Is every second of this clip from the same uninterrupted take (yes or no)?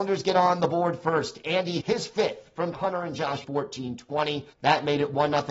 no